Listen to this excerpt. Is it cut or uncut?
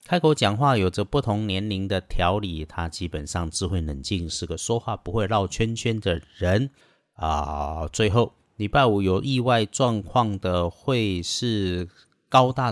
uncut